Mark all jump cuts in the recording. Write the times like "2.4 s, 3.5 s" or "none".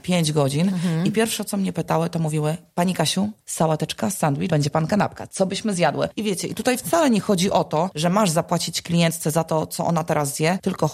3.4 s, 4.5 s